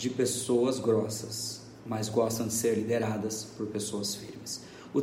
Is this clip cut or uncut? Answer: uncut